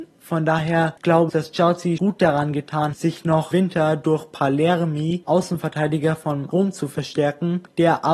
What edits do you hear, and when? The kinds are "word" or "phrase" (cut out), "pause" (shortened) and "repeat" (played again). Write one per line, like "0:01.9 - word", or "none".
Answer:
0:01.3 - word
0:02.0 - word
0:02.9 - word
0:03.5 - word
0:05.2 - word
0:06.5 - word